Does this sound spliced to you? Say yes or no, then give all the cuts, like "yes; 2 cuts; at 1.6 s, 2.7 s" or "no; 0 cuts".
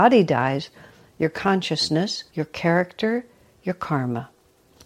yes; 1 cut; at 2.3 s